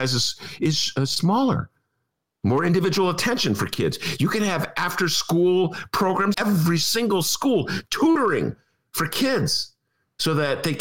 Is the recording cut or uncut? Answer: cut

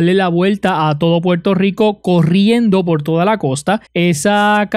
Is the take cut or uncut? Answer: cut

